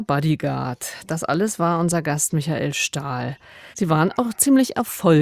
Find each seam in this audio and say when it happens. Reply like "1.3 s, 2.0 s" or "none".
3.7 s